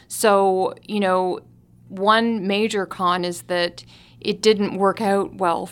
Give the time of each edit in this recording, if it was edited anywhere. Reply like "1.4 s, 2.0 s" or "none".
none

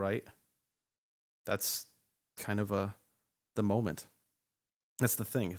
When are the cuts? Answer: none

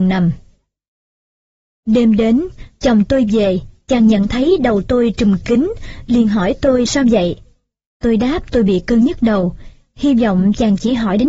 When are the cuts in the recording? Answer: 6.9 s

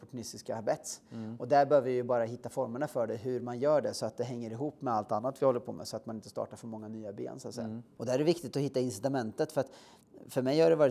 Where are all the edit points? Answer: none

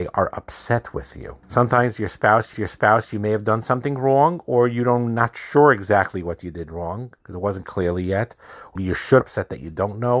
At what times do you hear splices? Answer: 1.4 s, 2.5 s, 7.2 s, 7.6 s, 8.8 s, 9.2 s

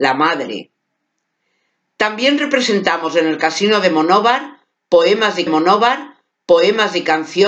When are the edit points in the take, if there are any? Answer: 5.5 s

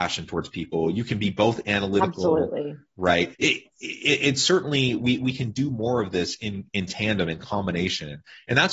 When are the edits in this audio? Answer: 3.3 s

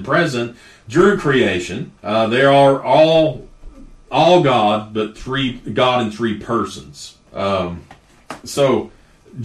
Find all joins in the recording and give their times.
2.0 s, 7.3 s

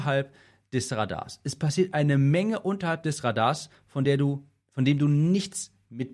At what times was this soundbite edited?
none

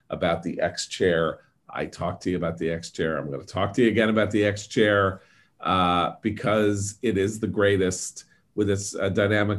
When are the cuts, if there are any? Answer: none

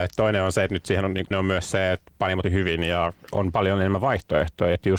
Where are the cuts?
1.3 s, 2.4 s

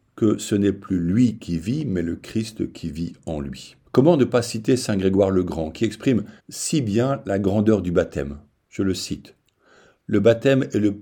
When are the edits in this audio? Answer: 3.8 s, 6.4 s

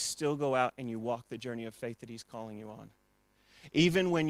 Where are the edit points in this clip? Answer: none

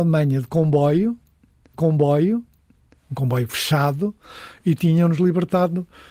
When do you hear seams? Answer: 1.7 s

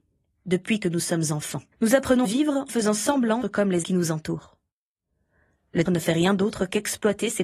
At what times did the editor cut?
1.7 s, 2.2 s, 2.7 s, 3.4 s, 3.8 s, 5.9 s

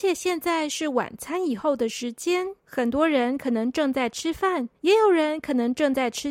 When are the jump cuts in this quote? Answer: 2.6 s, 4.8 s

